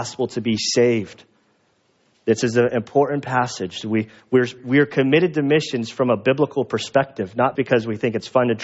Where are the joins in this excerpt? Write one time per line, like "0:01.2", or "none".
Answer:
0:04.6
0:07.6